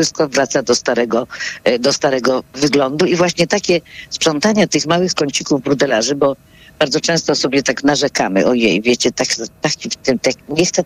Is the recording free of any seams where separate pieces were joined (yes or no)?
yes